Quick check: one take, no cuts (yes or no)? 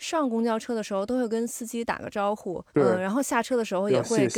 no